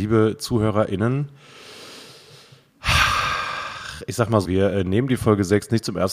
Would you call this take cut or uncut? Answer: cut